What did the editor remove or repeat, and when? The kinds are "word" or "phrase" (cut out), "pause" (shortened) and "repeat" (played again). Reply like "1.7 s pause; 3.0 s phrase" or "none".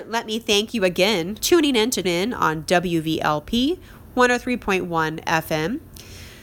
1.4 s word; 2.0 s word